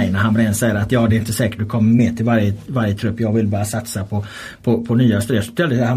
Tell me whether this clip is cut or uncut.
uncut